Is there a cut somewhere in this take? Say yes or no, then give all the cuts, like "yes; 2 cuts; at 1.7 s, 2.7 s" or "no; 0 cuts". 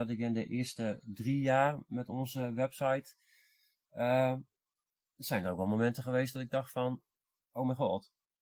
no; 0 cuts